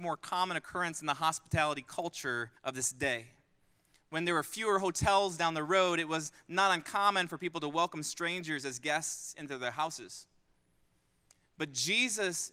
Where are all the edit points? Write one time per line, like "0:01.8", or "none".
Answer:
0:02.6